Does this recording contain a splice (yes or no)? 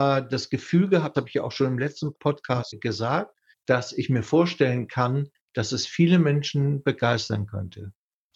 yes